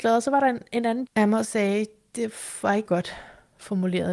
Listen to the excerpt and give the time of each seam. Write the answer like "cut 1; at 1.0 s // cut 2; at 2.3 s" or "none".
cut 1; at 1.1 s // cut 2; at 1.4 s // cut 3; at 2.8 s